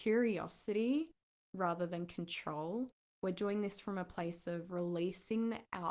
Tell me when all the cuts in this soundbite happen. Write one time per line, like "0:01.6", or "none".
none

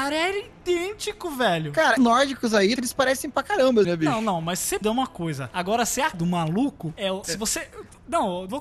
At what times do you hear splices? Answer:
0:02.0
0:02.8
0:03.8
0:04.8
0:06.1
0:07.2

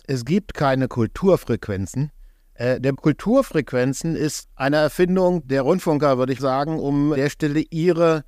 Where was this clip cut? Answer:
0:02.9
0:04.4
0:05.4
0:06.4
0:07.1

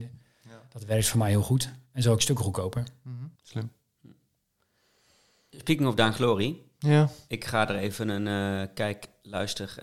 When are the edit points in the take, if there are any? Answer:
0:03.3

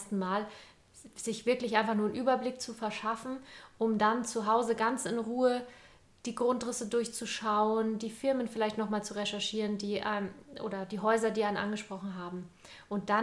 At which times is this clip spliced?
none

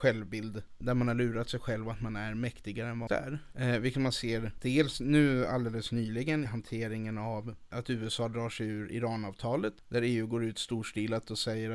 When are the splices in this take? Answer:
0:03.1
0:06.4

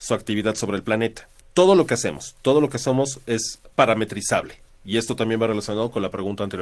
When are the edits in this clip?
0:01.4
0:03.7

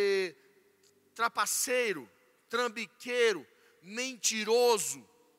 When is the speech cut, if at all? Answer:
none

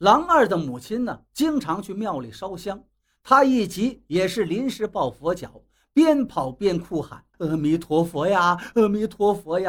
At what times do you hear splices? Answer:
0:07.3

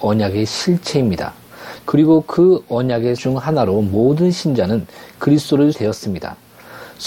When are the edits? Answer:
0:03.2
0:05.7

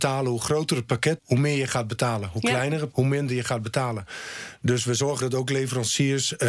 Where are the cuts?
0:01.2
0:02.9
0:05.2

